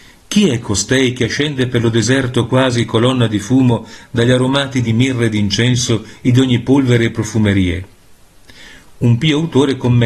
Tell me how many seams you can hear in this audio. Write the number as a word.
zero